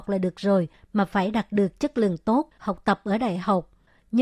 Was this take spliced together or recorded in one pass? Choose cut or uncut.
uncut